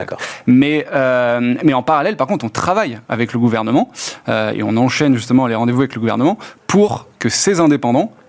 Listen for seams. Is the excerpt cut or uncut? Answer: uncut